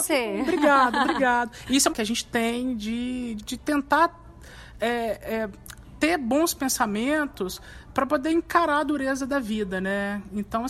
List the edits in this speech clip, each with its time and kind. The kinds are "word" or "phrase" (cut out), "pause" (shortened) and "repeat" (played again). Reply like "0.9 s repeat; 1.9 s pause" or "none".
1.9 s phrase; 3.4 s word